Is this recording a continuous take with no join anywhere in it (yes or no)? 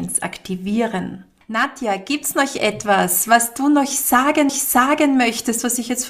no